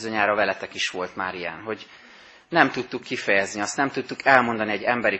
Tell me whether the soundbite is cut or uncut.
uncut